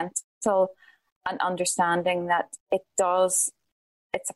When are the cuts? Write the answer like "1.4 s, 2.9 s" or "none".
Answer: 2.6 s